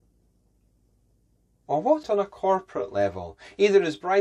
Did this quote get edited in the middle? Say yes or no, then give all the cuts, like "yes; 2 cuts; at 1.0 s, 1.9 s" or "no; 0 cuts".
yes; 1 cut; at 2.0 s